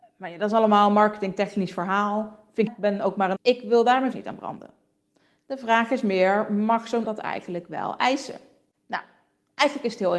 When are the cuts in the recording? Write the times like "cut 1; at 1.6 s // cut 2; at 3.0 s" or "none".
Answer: cut 1; at 2.7 s // cut 2; at 3.4 s // cut 3; at 4.1 s // cut 4; at 7.0 s